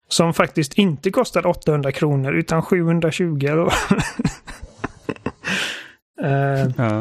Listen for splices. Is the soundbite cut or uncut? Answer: uncut